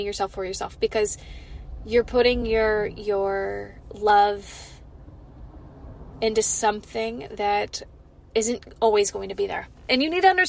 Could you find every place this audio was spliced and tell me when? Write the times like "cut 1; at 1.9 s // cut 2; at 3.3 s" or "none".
none